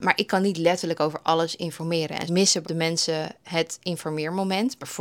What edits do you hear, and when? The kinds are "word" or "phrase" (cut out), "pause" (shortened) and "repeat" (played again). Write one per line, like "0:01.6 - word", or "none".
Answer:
0:02.3 - word
0:02.6 - word